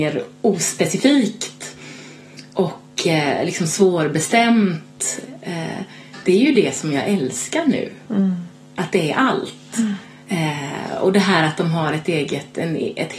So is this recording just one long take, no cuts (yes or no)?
yes